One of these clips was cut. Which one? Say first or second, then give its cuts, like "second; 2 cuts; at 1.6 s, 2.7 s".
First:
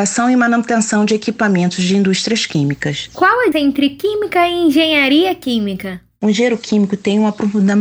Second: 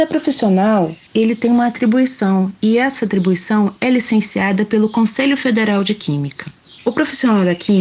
first; 1 cut; at 3.5 s